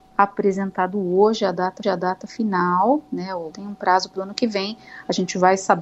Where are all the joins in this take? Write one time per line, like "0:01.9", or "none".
0:01.8
0:03.5
0:04.2